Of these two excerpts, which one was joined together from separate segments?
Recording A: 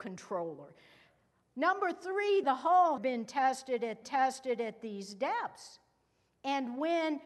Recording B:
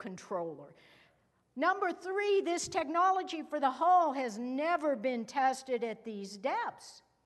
A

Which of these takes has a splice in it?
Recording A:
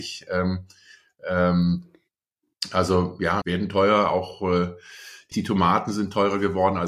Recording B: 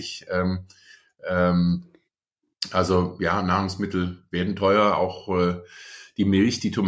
A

